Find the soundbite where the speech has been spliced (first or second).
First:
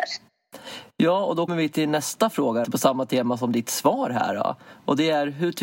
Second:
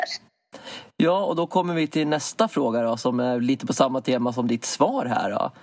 first